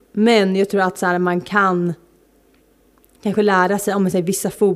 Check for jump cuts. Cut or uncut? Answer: uncut